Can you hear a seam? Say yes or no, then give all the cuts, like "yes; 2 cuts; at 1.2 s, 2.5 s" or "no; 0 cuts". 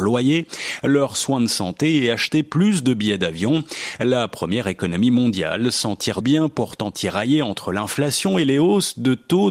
yes; 1 cut; at 6.2 s